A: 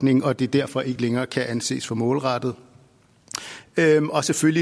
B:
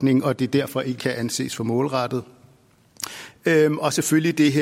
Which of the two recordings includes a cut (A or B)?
B